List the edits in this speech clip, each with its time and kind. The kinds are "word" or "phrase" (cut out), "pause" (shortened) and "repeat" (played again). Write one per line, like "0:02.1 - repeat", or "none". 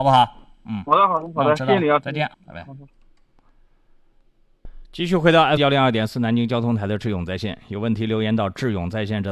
0:02.3 - word
0:04.8 - pause
0:05.6 - word